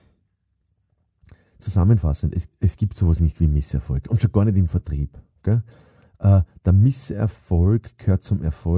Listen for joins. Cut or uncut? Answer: cut